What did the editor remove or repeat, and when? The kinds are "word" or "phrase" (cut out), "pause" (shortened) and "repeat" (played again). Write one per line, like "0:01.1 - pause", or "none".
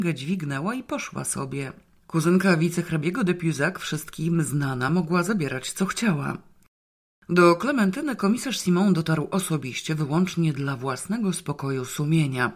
none